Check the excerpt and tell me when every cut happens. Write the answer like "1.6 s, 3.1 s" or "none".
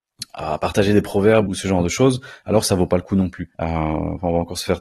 1.5 s, 3.5 s